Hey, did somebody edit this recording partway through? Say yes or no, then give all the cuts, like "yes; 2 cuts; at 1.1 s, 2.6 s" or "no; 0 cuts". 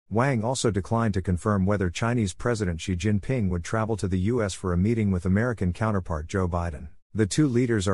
yes; 1 cut; at 7.0 s